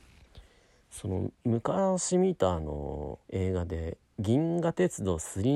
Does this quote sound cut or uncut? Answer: cut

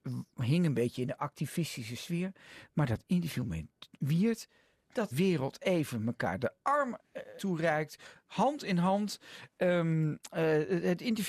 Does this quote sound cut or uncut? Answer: cut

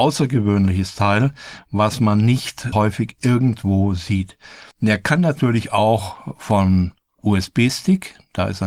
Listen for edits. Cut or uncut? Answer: cut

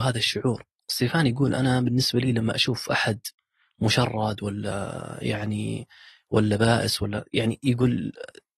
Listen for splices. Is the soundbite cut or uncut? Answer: uncut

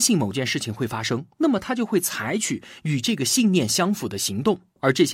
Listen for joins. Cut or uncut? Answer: uncut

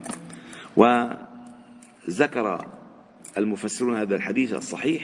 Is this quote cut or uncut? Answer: uncut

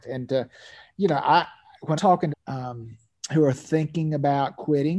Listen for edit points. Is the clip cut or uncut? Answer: cut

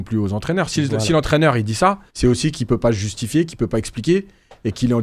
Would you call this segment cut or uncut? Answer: cut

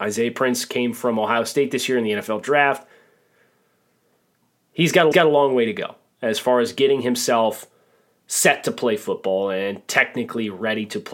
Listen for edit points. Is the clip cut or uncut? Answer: cut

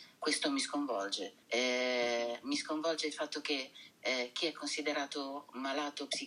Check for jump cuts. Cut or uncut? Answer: cut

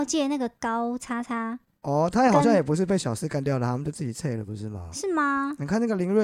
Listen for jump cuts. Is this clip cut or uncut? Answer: uncut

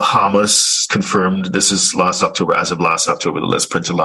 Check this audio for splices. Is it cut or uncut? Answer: uncut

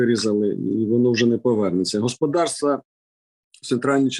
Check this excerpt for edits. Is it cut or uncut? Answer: uncut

